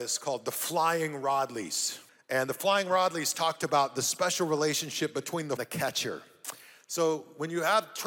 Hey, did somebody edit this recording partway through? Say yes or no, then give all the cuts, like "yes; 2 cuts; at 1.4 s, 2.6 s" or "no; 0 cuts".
yes; 2 cuts; at 2.1 s, 5.6 s